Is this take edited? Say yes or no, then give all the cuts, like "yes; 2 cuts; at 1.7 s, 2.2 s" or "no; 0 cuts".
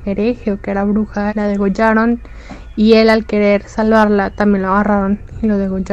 yes; 1 cut; at 1.3 s